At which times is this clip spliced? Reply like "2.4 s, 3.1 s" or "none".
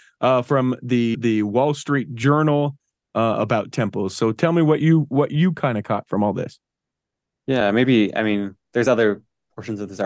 1.1 s